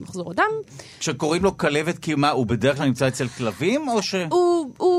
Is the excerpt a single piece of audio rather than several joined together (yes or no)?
yes